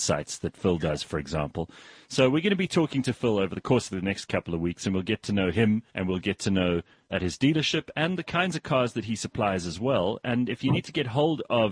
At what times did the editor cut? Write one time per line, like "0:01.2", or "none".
0:03.6
0:05.9
0:07.1